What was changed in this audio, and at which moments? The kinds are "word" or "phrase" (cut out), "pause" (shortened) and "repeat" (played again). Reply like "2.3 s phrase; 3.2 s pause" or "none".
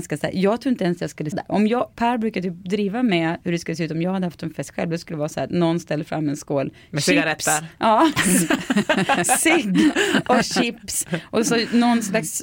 1.3 s word; 1.9 s pause